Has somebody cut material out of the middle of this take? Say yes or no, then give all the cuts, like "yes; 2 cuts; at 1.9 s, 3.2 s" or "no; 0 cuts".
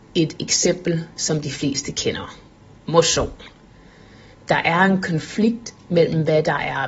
no; 0 cuts